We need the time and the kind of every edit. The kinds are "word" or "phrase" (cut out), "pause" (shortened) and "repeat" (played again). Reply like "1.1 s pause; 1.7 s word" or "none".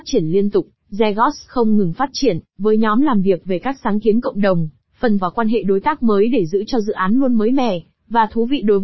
5.2 s word